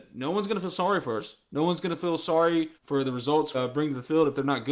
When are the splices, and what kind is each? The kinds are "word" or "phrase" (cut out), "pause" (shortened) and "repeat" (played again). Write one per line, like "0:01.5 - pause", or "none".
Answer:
0:02.8 - pause
0:03.5 - word